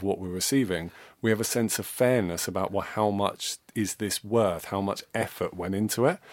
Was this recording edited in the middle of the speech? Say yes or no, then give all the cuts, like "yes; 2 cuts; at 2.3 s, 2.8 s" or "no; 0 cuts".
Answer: no; 0 cuts